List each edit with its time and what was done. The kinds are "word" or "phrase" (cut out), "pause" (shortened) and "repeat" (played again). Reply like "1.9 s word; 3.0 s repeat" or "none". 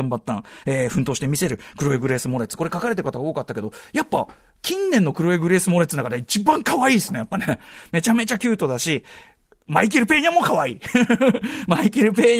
none